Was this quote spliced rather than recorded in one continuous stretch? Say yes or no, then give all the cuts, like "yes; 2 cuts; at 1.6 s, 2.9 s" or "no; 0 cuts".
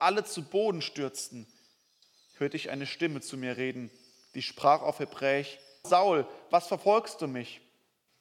yes; 1 cut; at 5.8 s